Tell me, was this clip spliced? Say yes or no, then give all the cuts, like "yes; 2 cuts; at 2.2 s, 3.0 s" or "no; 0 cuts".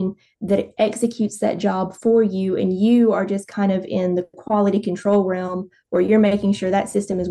no; 0 cuts